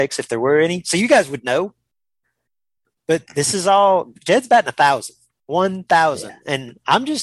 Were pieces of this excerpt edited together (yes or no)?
no